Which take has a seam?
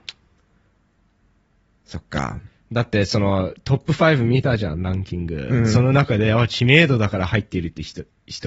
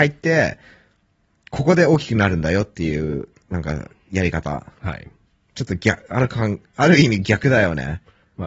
second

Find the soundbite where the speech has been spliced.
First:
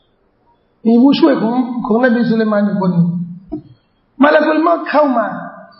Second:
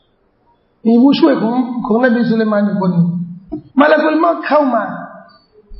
second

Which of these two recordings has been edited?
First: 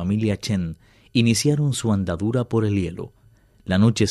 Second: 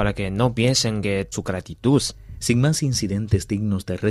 second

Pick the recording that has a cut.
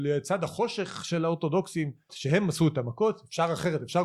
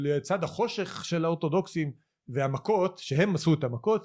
first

